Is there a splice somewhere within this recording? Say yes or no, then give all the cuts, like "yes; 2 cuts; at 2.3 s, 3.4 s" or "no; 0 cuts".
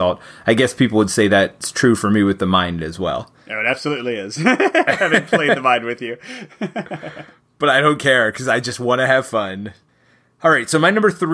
no; 0 cuts